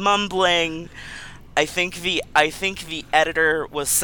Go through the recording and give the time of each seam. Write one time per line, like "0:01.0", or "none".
none